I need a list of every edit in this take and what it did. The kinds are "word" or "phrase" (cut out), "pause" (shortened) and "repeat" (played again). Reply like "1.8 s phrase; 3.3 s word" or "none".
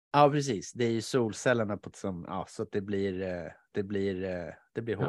1.9 s word; 3.7 s repeat